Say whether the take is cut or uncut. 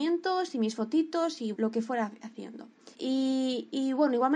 cut